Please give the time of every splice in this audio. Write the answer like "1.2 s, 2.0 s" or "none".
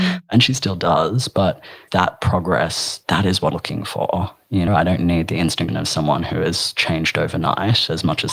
1.9 s, 3.5 s, 4.7 s, 5.7 s